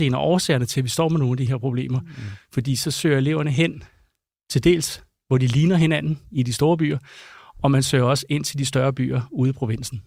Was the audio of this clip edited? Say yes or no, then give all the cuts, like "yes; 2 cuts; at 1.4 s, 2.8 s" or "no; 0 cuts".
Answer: no; 0 cuts